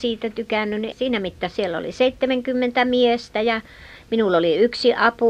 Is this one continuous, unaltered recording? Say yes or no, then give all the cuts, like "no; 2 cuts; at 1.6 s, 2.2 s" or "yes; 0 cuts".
no; 1 cut; at 0.9 s